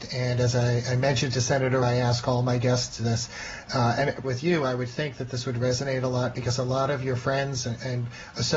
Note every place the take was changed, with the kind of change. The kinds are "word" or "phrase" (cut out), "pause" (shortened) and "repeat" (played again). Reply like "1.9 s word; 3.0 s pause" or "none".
1.8 s word; 4.2 s word